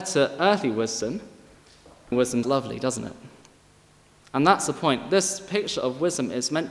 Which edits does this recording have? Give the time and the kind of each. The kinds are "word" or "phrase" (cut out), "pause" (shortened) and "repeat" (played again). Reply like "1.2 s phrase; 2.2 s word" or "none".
2.1 s word; 2.4 s word